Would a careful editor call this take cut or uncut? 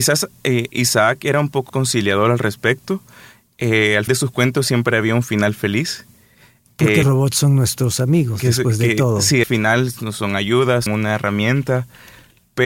cut